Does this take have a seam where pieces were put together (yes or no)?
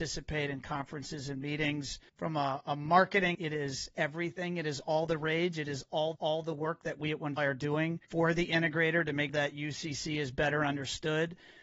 yes